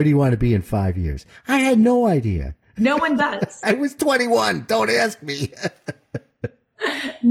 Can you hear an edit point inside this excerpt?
no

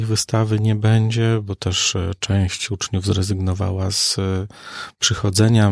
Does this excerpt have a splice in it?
no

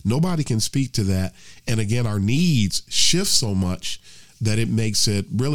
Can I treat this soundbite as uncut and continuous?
yes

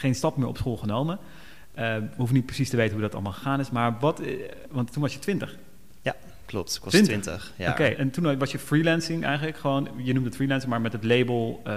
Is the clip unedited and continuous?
no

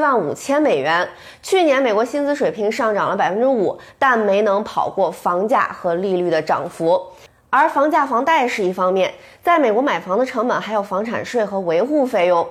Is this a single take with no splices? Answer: yes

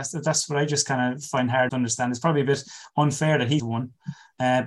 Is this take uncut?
no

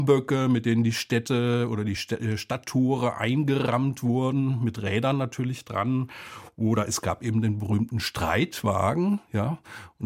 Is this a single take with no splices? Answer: yes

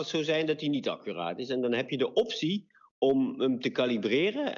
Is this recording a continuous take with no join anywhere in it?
yes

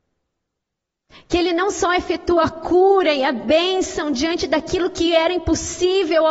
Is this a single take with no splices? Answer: yes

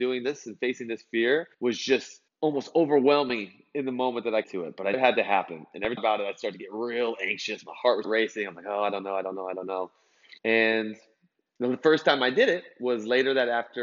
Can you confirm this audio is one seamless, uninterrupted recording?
no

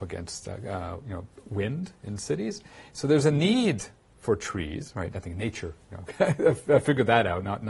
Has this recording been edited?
no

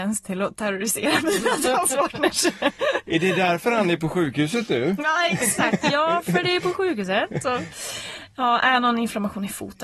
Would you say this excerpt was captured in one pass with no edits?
yes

